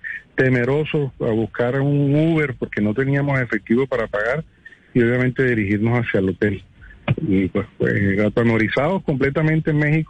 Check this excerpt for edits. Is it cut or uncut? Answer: uncut